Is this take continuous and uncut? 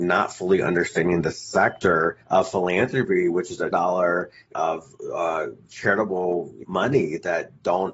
no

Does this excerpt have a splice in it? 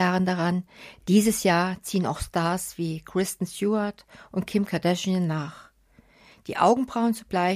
no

